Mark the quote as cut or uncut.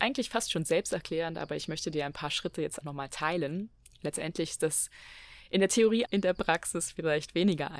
cut